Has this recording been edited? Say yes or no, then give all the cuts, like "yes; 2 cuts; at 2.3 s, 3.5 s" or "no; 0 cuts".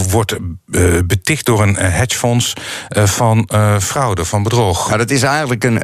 no; 0 cuts